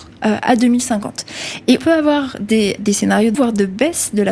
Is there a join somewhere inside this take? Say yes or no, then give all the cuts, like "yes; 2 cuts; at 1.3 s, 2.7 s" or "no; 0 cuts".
yes; 3 cuts; at 1.8 s, 2.8 s, 3.3 s